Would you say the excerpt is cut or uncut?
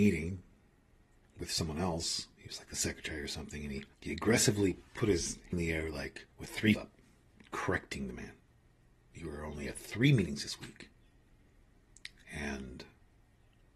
cut